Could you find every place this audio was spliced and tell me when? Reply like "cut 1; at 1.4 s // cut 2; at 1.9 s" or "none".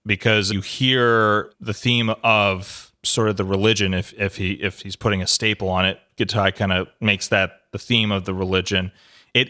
none